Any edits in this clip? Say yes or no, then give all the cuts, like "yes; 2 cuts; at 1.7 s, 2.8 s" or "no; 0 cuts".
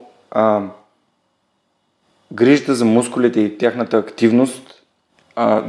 no; 0 cuts